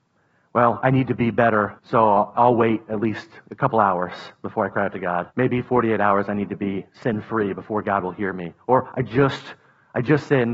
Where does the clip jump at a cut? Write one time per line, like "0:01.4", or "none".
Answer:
0:01.8
0:05.3